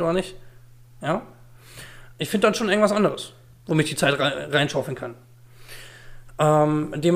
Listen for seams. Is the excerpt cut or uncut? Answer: uncut